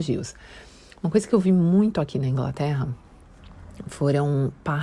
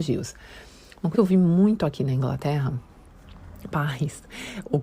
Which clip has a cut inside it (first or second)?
second